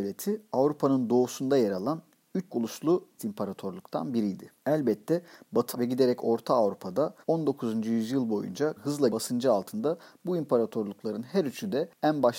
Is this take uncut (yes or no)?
no